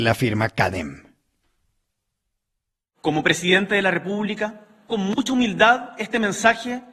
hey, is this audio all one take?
no; 1 cut; at 4.9 s

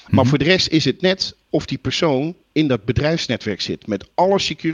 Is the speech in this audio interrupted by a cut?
no; 0 cuts

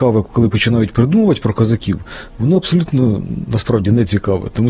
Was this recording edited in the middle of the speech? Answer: no; 0 cuts

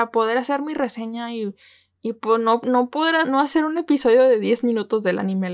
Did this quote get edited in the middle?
yes; 1 cut; at 3.2 s

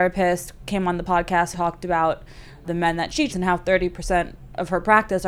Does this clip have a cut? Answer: yes; 3 cuts; at 1.5 s, 2.6 s, 3.3 s

